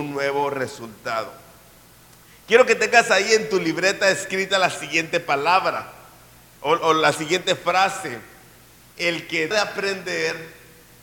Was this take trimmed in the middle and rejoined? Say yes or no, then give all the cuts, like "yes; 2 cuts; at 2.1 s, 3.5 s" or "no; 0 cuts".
yes; 1 cut; at 9.5 s